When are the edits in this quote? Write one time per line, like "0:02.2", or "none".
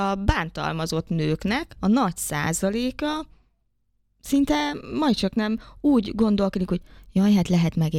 none